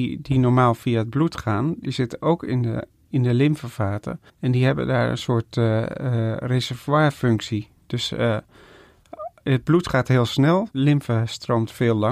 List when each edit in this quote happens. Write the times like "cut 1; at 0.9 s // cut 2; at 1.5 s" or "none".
cut 1; at 4.3 s // cut 2; at 10.7 s